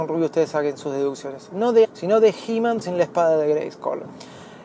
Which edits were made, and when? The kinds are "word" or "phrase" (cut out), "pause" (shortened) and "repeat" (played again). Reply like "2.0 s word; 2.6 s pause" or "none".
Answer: 1.8 s word; 2.8 s word